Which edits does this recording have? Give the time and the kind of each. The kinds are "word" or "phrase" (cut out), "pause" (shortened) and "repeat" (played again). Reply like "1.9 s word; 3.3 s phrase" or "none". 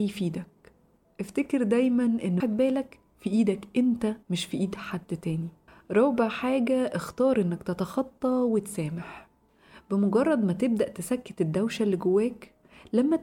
2.4 s phrase; 4.2 s pause; 5.7 s pause